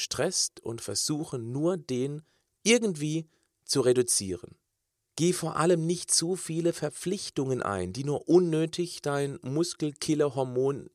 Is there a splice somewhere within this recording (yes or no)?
no